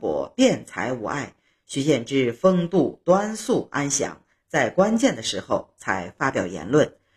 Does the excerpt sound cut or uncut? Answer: uncut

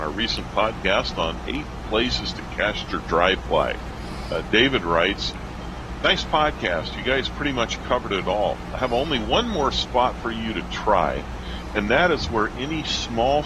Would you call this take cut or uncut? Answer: uncut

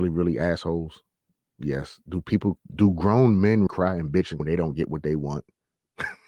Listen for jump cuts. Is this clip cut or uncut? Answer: cut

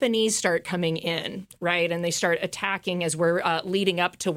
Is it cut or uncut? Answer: uncut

